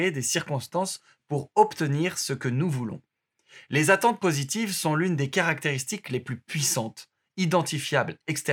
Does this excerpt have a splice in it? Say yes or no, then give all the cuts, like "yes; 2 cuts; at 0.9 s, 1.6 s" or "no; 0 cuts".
no; 0 cuts